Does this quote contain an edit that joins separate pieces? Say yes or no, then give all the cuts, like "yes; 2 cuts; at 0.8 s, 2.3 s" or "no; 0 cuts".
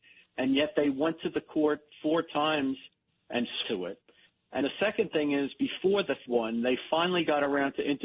yes; 3 cuts; at 3.6 s, 4.6 s, 6.3 s